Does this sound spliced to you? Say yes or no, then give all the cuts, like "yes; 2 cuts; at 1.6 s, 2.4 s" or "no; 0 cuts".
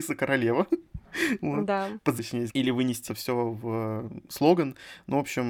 yes; 3 cuts; at 2.2 s, 2.5 s, 3.1 s